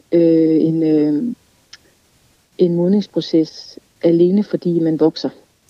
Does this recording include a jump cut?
no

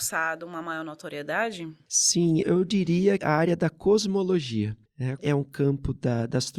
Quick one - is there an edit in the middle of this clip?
yes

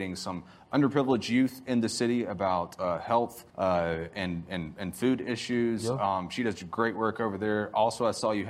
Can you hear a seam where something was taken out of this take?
yes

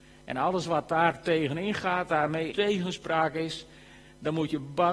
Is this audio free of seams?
no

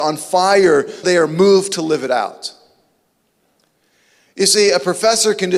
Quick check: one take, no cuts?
no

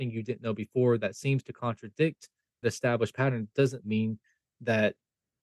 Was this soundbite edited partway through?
yes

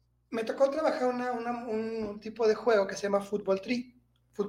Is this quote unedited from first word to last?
yes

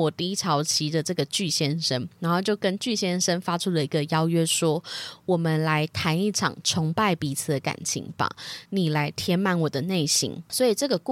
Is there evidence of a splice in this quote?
yes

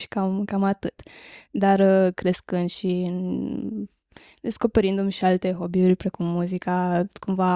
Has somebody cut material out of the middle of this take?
no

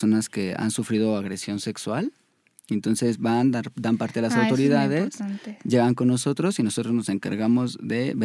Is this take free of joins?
yes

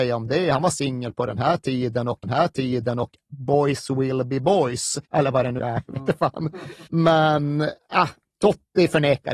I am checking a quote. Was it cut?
yes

